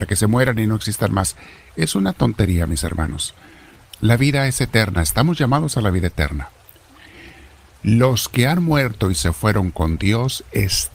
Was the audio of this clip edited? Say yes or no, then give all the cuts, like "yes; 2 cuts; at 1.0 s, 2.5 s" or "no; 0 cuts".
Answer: no; 0 cuts